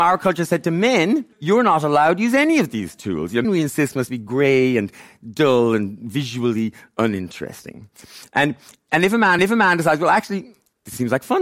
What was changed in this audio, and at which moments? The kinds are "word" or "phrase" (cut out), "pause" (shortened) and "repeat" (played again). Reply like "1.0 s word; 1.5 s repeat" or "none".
1.3 s pause; 3.4 s word; 9.4 s repeat